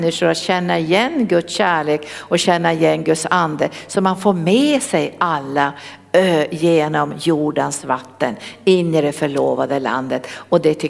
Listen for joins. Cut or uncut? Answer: uncut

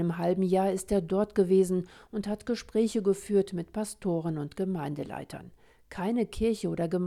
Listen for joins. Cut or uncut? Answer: uncut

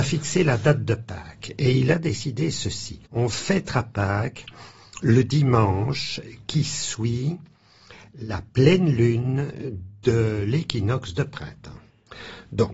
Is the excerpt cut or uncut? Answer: cut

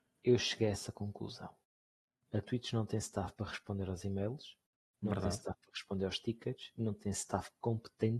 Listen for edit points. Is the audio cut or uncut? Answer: uncut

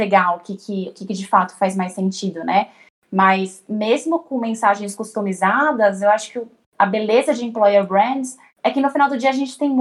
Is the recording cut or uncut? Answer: uncut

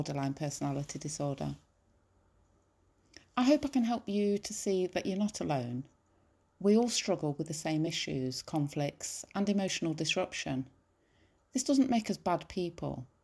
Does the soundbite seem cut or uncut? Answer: uncut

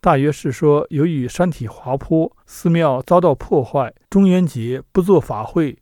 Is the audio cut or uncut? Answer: cut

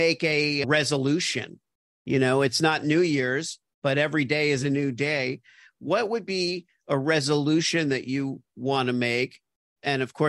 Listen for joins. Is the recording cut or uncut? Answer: uncut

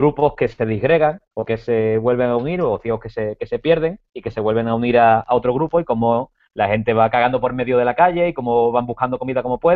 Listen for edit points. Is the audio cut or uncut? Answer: cut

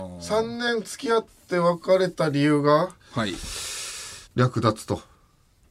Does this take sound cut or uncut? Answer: cut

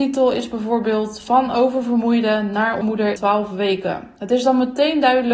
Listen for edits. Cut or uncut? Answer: cut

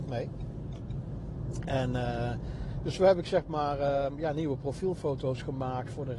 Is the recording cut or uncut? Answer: uncut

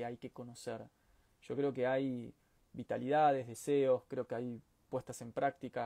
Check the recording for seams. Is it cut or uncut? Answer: uncut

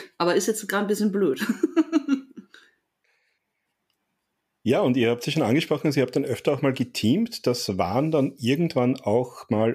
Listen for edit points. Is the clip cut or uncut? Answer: uncut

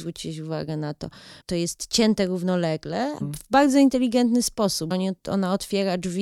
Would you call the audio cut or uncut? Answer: cut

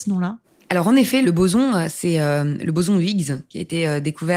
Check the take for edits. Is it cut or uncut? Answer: uncut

